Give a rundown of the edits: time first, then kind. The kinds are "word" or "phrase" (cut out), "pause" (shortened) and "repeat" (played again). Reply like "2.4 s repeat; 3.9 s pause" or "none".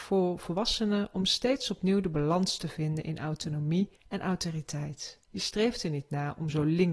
4.0 s pause; 5.2 s pause